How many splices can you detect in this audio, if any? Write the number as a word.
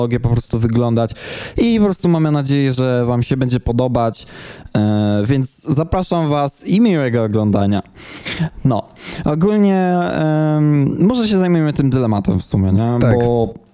zero